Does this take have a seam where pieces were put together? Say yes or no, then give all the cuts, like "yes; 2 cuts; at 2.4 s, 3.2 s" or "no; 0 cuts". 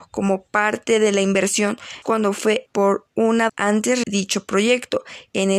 yes; 4 cuts; at 2.0 s, 2.7 s, 3.5 s, 4.0 s